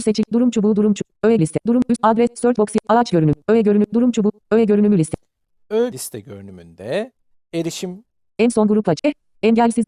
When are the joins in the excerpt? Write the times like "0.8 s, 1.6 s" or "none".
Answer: 1.4 s, 2.6 s, 5.9 s